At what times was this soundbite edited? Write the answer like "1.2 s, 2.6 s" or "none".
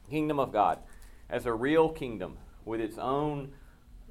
none